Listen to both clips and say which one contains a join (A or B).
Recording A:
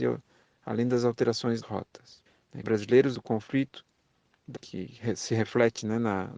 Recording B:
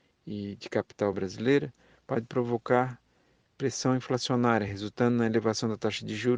A